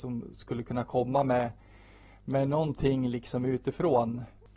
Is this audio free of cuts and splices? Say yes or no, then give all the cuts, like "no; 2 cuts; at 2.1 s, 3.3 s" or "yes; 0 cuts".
yes; 0 cuts